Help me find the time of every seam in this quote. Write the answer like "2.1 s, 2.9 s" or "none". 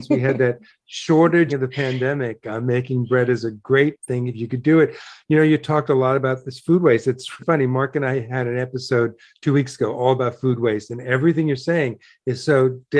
1.5 s, 7.4 s

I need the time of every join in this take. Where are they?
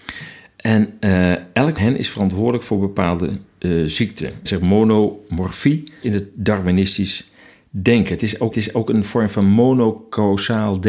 1.8 s, 4.5 s, 6.0 s, 8.5 s

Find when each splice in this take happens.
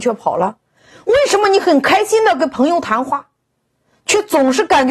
none

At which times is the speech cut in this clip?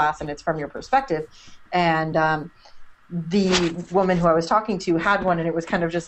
none

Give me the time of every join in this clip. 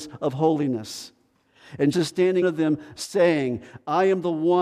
1.9 s, 2.4 s

